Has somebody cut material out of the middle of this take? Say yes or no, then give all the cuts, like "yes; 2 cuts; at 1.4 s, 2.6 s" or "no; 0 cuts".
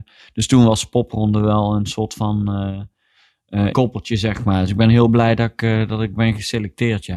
yes; 1 cut; at 3.7 s